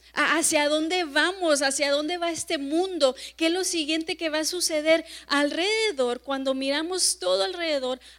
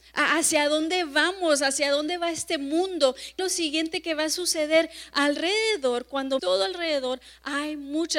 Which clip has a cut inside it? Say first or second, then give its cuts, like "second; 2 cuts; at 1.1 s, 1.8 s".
second; 2 cuts; at 3.4 s, 6.4 s